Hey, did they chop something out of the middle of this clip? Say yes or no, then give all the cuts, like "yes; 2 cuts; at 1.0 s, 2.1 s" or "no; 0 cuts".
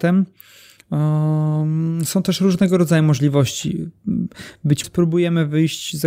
yes; 1 cut; at 4.8 s